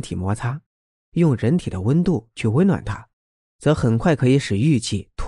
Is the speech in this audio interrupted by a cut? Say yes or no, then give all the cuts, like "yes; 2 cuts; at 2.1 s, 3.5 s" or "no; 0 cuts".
no; 0 cuts